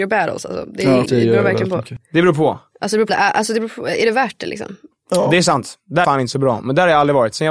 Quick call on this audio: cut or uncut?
cut